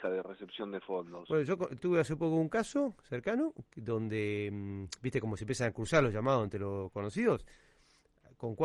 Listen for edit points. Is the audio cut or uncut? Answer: cut